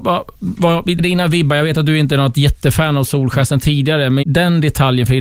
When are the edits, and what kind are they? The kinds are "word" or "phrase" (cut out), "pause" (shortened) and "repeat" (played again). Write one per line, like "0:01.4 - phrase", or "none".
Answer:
0:01.0 - word
0:04.2 - word